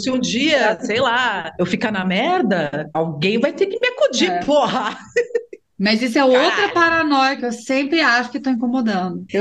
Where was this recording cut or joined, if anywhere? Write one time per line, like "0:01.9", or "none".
0:07.4